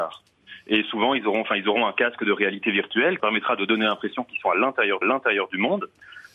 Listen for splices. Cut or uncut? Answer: cut